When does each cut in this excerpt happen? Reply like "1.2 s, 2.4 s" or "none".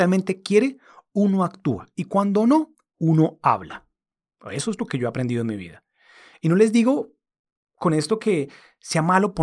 none